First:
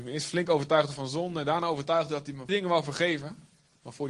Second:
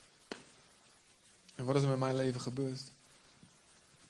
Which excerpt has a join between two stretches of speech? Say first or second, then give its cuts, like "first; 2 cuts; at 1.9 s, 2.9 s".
first; 1 cut; at 2.5 s